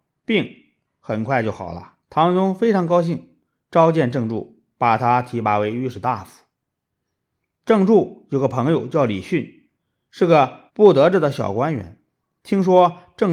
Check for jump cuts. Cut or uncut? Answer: cut